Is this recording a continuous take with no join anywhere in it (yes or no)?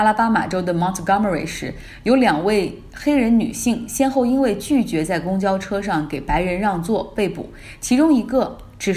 yes